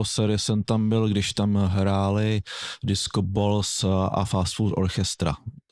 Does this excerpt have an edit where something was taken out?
no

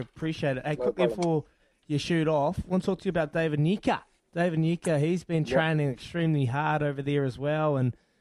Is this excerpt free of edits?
yes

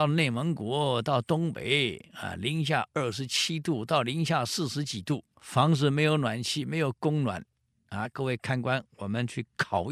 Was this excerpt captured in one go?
no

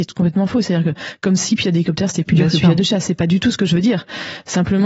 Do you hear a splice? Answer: no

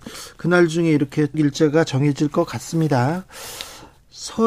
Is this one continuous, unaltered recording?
no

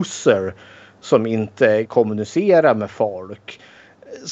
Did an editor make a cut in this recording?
yes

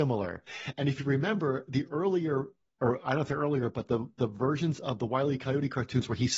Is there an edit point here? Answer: no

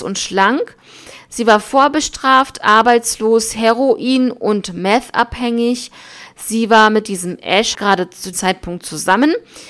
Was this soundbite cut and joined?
yes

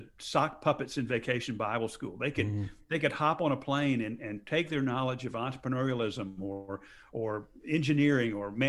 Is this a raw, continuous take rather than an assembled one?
yes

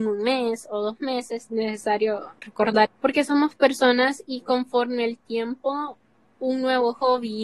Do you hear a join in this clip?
yes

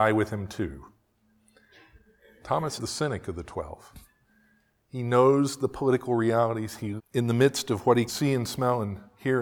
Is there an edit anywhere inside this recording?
yes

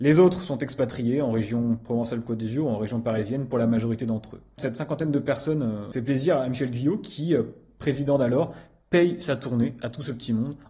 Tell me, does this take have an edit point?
no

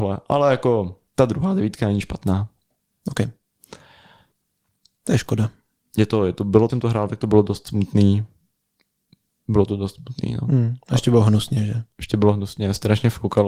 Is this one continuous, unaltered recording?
no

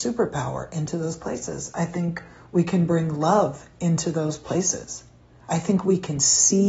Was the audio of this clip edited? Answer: no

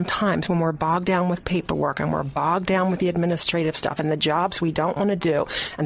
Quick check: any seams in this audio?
no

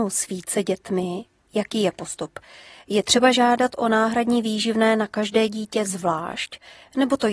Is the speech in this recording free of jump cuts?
yes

